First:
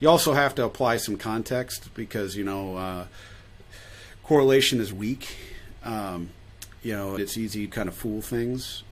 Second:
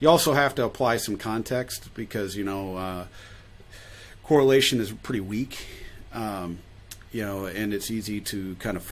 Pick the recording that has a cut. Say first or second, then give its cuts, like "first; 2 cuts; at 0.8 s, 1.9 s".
first; 3 cuts; at 4.9 s, 7.2 s, 7.7 s